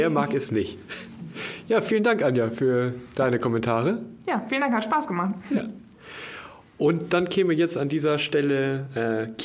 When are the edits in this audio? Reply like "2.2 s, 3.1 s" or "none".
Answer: none